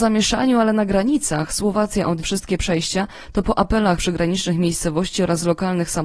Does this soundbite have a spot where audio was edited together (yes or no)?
yes